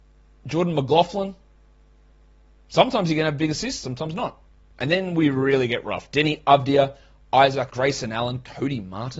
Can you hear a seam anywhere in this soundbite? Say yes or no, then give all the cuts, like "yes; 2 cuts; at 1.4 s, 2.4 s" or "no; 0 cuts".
yes; 1 cut; at 7.7 s